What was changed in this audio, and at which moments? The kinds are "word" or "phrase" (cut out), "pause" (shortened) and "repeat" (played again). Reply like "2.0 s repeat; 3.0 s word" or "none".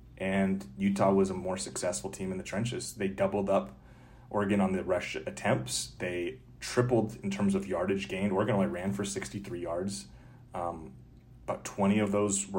none